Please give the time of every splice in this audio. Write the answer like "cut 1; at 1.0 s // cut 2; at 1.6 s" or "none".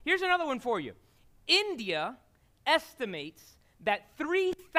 none

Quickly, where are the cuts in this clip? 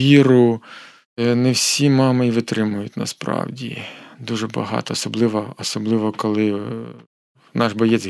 none

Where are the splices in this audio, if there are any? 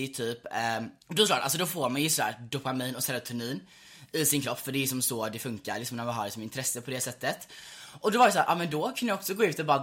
cut 1; at 1.0 s

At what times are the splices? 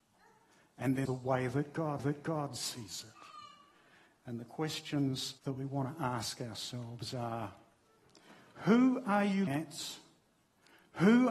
cut 1; at 1.1 s // cut 2; at 2.0 s // cut 3; at 5.4 s // cut 4; at 9.5 s

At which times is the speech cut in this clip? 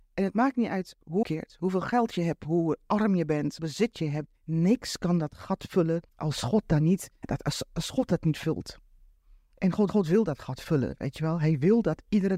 cut 1; at 1.2 s // cut 2; at 3.6 s // cut 3; at 4.4 s // cut 4; at 6.1 s // cut 5; at 7.2 s // cut 6; at 9.9 s

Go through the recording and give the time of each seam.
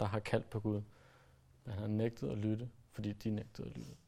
none

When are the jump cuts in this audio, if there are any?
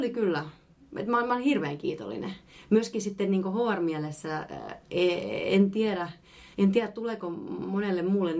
cut 1; at 6.5 s

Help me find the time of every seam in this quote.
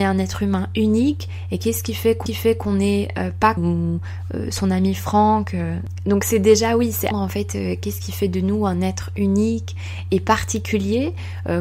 cut 1; at 2.3 s // cut 2; at 3.6 s // cut 3; at 7.1 s

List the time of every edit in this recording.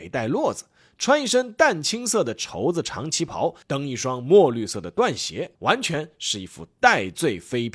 cut 1; at 3.6 s // cut 2; at 5.6 s

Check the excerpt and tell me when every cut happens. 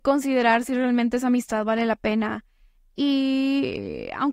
none

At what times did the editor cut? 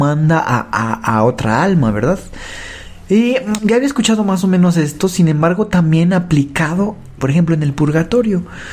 cut 1; at 3.6 s // cut 2; at 7.2 s

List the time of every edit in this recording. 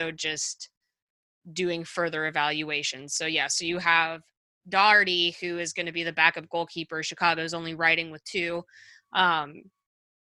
none

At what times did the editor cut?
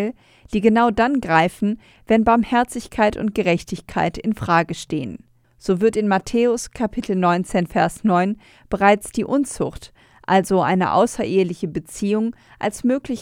none

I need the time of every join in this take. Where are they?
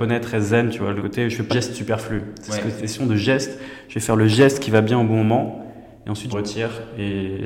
cut 1; at 1.0 s // cut 2; at 1.5 s // cut 3; at 6.3 s

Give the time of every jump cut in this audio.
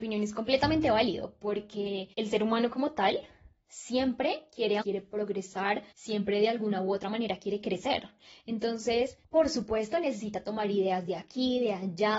cut 1; at 2.1 s // cut 2; at 4.8 s // cut 3; at 5.9 s // cut 4; at 9.2 s

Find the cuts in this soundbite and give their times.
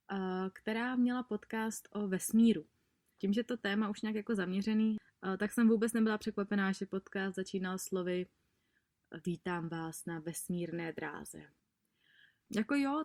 none

